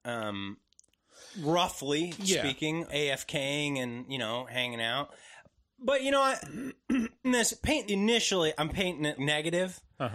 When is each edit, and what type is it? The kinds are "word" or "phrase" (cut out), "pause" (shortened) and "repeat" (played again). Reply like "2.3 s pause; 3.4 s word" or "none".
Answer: 2.9 s word; 7.2 s word; 7.8 s word; 9.2 s word